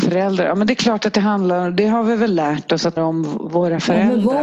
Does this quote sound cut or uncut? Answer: cut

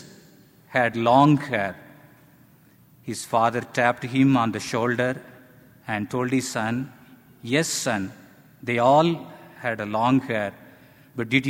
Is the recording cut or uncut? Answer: uncut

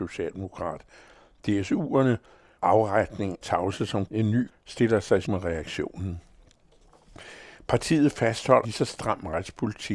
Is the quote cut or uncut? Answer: cut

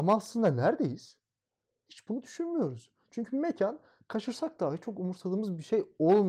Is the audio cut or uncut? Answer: uncut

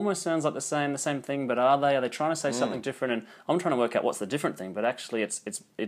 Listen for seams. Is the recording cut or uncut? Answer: uncut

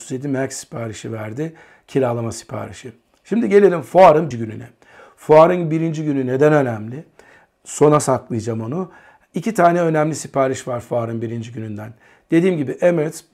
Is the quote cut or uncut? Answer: cut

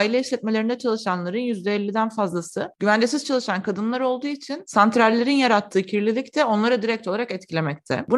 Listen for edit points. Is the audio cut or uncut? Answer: uncut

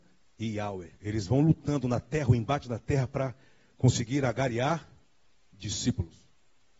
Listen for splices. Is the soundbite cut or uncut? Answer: cut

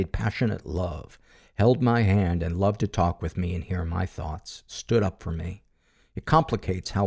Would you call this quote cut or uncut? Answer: uncut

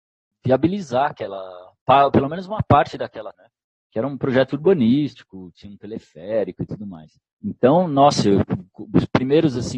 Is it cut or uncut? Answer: cut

